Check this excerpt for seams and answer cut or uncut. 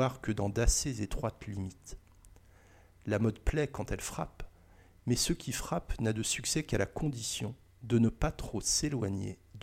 uncut